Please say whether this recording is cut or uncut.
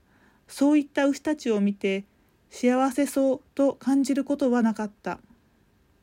uncut